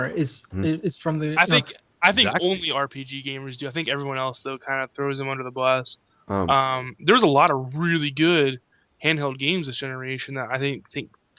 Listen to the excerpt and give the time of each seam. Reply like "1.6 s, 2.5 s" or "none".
none